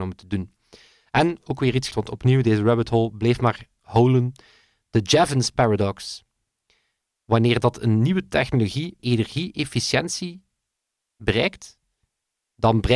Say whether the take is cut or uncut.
cut